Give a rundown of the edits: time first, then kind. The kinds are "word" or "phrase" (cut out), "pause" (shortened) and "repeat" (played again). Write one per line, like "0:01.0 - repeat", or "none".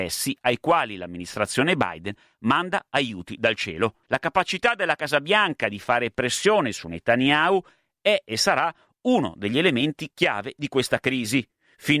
0:04.0 - pause